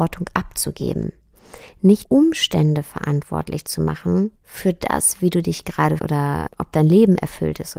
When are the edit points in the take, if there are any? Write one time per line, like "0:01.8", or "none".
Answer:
0:02.0
0:04.4
0:06.0
0:06.5

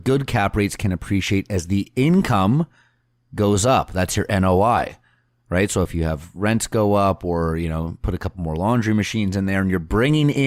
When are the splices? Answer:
none

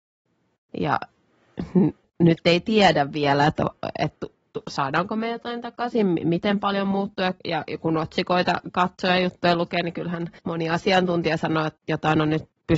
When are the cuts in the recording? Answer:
0:02.0
0:10.4

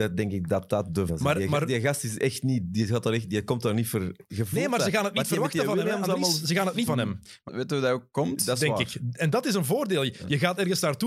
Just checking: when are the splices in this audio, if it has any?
0:01.1
0:06.9
0:07.5

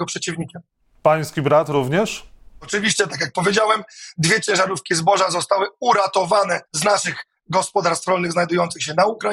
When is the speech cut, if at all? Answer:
0:02.6
0:06.7

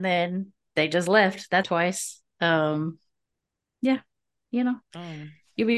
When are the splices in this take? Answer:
0:01.6

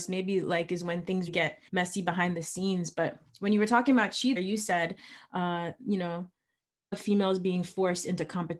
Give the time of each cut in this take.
0:01.3
0:01.7
0:04.4
0:06.9

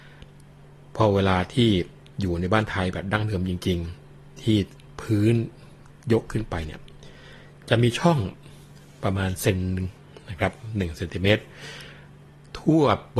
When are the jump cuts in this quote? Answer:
none

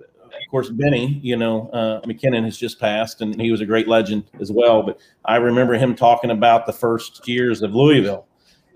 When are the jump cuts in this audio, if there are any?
0:03.4
0:04.3
0:07.2

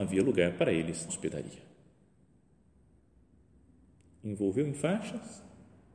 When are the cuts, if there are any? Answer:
0:01.1

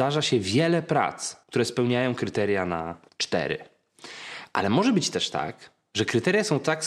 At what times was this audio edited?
0:01.4
0:03.1

